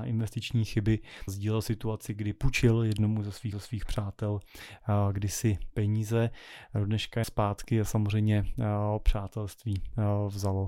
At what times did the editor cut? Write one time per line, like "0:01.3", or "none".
0:01.3
0:03.5
0:07.2